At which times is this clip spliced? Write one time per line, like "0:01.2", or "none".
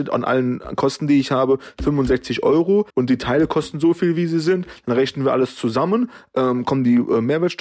0:02.9